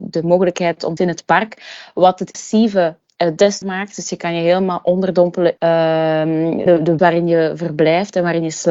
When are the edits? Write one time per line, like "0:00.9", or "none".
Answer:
0:01.0
0:02.3
0:03.6
0:05.6
0:06.7
0:07.0